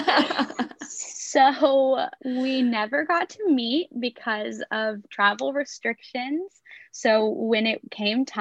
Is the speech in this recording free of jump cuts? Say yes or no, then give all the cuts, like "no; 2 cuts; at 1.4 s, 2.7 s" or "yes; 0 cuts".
yes; 0 cuts